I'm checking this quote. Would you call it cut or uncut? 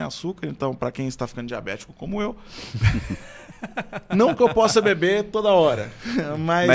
uncut